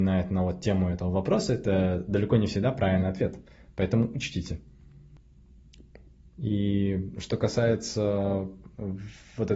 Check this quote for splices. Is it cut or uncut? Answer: uncut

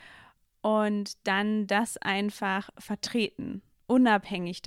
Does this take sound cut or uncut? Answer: uncut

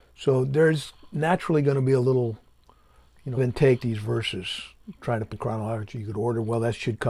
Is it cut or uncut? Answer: cut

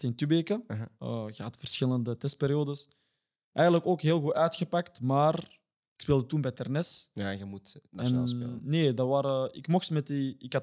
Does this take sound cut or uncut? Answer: uncut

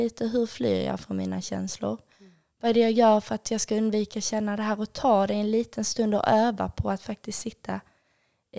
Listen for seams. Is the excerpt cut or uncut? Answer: uncut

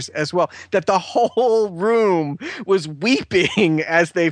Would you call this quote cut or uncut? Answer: uncut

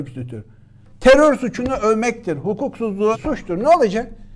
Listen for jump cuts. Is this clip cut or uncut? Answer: cut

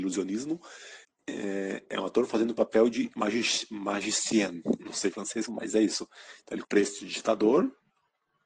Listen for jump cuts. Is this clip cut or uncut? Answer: cut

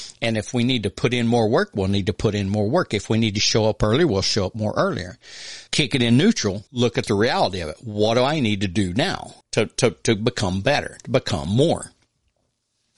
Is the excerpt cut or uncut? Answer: cut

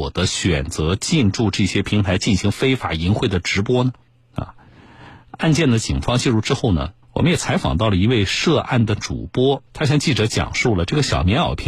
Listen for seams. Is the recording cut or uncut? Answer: cut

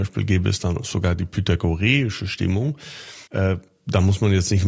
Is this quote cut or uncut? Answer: cut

